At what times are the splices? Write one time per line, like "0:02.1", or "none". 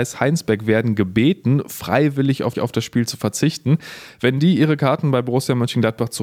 0:02.5